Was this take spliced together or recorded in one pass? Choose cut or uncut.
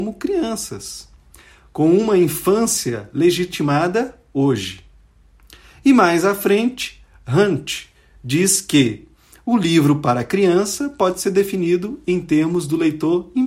uncut